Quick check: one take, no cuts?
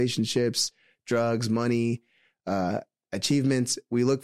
yes; 0 cuts

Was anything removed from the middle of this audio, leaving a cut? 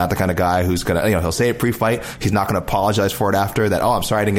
no; 0 cuts

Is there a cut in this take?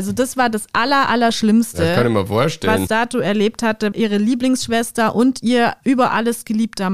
yes; 2 cuts; at 2.9 s, 3.9 s

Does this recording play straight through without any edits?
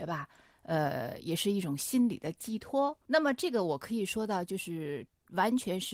no; 1 cut; at 3.0 s

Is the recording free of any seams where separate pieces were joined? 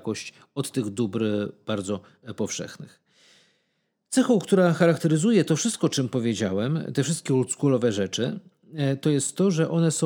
yes; 0 cuts

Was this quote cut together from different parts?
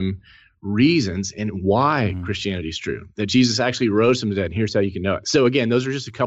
no; 0 cuts

